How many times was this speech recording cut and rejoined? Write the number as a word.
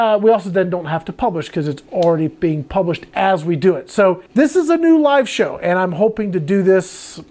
one